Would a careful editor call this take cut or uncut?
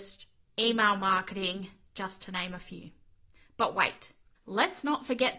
uncut